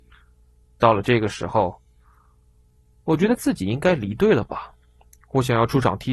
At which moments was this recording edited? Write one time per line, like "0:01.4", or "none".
none